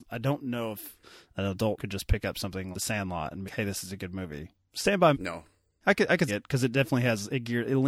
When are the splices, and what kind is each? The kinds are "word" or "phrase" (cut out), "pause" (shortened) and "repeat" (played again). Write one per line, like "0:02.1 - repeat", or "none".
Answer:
0:01.8 - word
0:02.7 - word
0:03.4 - word
0:05.1 - word
0:05.8 - word
0:06.3 - word